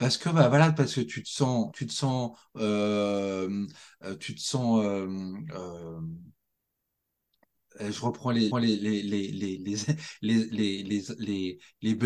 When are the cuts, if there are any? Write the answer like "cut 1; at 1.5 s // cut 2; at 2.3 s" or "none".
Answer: cut 1; at 1.7 s // cut 2; at 8.5 s